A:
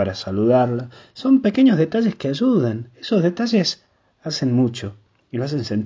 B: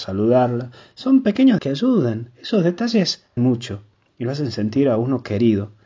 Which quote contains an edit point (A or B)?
B